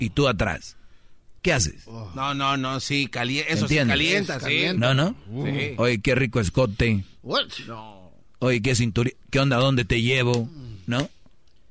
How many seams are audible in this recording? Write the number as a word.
two